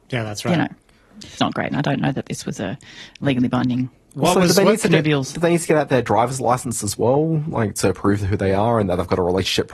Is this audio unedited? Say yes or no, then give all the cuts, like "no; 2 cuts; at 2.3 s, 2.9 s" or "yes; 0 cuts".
no; 2 cuts; at 1.4 s, 5.3 s